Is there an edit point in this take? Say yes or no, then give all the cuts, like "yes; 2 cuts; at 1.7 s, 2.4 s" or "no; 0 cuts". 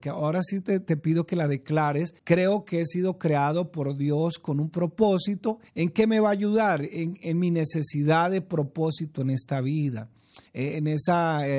yes; 3 cuts; at 2.2 s, 5.7 s, 10.5 s